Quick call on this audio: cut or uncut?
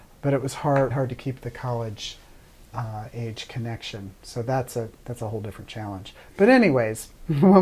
cut